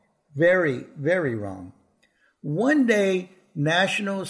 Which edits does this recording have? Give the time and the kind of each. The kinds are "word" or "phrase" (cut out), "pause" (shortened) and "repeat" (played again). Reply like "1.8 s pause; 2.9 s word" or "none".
none